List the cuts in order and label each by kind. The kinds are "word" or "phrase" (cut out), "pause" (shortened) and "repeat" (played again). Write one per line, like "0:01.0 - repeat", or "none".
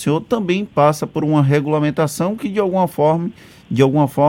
none